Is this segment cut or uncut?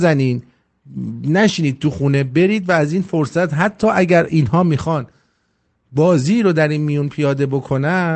uncut